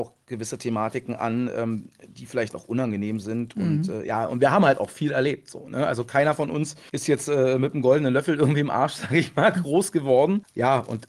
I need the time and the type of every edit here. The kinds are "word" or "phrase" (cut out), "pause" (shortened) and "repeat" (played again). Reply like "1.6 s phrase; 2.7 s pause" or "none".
none